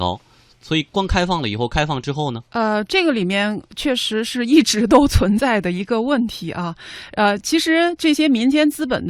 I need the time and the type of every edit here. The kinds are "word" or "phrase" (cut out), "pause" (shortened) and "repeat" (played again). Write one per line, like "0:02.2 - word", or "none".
0:02.4 - pause